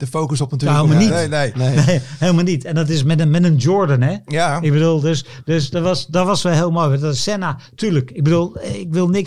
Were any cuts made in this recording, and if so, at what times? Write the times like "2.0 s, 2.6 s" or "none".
none